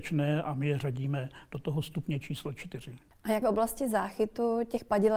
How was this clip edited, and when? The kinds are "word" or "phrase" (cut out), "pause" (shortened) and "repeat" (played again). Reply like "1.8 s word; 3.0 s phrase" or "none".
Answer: 3.4 s word